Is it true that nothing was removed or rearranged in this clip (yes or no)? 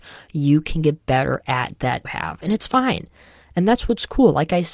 no